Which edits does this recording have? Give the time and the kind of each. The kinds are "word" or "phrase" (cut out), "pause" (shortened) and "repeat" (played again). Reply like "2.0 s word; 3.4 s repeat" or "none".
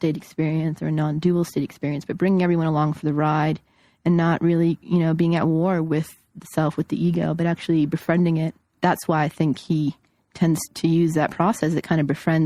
8.8 s word; 10.7 s word